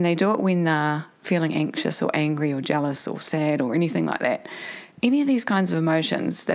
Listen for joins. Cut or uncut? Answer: uncut